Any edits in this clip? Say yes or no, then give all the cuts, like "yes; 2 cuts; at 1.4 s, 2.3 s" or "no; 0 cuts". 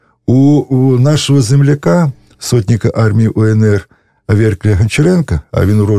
no; 0 cuts